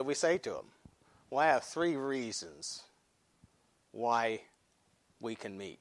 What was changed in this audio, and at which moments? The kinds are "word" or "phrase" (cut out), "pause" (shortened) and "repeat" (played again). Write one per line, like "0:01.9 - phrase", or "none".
none